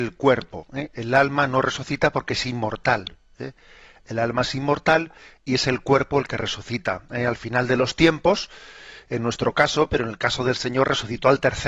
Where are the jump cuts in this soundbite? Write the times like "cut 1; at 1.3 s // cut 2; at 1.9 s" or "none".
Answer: none